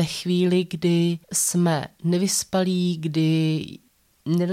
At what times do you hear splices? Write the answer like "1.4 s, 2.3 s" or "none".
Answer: 1.2 s